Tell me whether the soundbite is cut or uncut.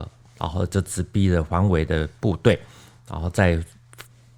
uncut